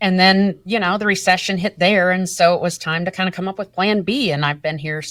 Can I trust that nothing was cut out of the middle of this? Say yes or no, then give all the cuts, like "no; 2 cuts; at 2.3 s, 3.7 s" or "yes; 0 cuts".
yes; 0 cuts